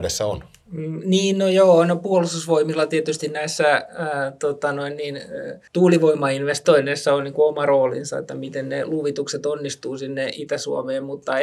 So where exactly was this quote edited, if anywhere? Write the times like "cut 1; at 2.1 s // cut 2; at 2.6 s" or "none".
cut 1; at 5.7 s